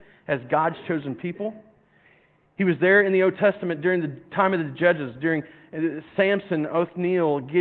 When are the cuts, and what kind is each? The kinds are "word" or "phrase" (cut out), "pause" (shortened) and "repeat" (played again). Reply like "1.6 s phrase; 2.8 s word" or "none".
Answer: none